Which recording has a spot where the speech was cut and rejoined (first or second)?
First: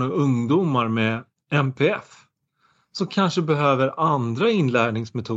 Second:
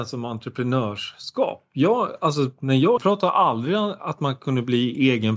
second